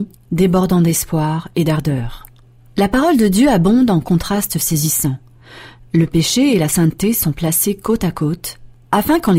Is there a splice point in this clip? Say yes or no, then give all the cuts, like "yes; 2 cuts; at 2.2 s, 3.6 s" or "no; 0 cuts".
no; 0 cuts